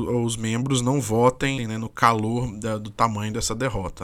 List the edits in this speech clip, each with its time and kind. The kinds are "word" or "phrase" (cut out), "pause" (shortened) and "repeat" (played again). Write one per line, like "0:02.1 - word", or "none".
0:01.6 - word